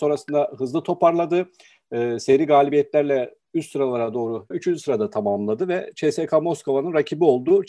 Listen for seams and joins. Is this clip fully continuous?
no; 1 cut; at 4.5 s

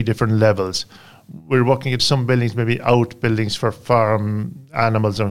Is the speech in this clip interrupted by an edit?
yes; 1 cut; at 2.0 s

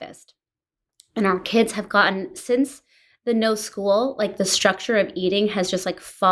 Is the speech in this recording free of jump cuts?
yes; 0 cuts

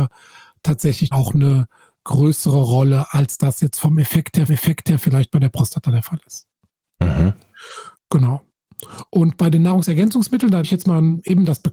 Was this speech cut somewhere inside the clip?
yes; 4 cuts; at 1.1 s, 4.5 s, 7.9 s, 10.6 s

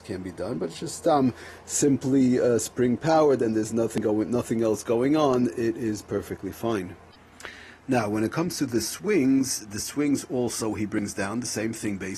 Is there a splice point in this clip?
no; 0 cuts

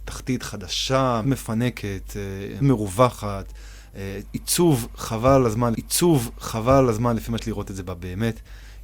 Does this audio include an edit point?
yes; 4 cuts; at 1.2 s, 2.6 s, 5.7 s, 7.4 s

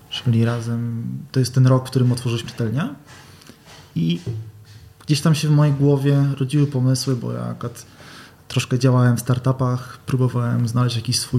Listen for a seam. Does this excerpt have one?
yes; 1 cut; at 2.5 s

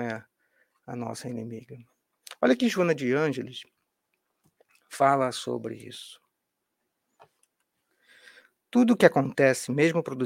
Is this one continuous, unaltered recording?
yes; 0 cuts

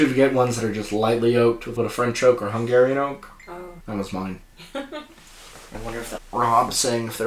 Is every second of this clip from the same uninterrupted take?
no; 5 cuts; at 1.8 s, 3.8 s, 4.4 s, 5.7 s, 6.2 s

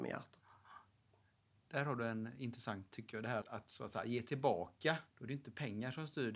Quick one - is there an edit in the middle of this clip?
yes; 3 cuts; at 2.9 s, 3.4 s, 5.1 s

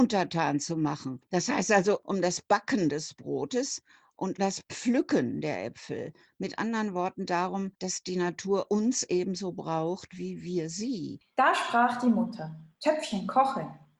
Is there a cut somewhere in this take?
yes; 3 cuts; at 4.4 s, 7.7 s, 12.7 s

